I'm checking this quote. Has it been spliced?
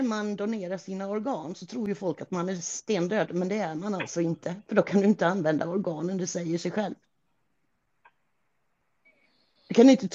no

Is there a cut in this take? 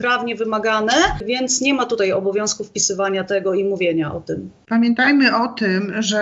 no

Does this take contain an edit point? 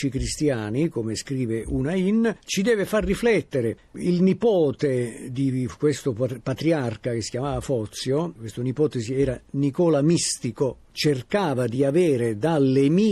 no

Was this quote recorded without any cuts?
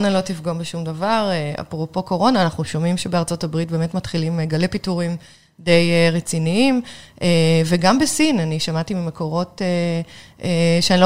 yes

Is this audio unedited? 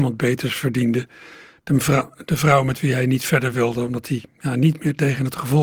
yes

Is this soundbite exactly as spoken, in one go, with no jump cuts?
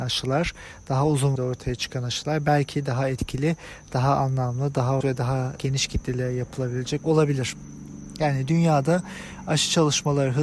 no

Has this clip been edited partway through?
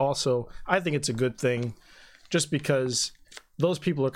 no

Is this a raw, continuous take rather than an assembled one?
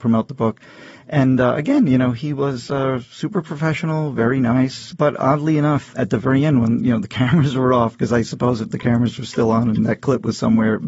yes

